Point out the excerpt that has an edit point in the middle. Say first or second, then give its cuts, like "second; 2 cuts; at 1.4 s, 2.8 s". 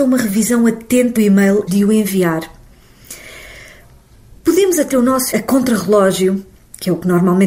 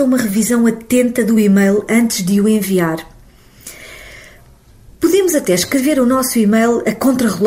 first; 4 cuts; at 1.2 s, 1.7 s, 4.9 s, 5.3 s